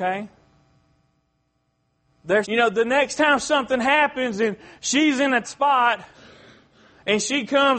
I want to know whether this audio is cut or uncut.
cut